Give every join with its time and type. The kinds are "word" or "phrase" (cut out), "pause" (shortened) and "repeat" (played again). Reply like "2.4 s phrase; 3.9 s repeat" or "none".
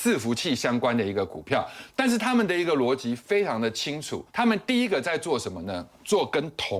4.3 s pause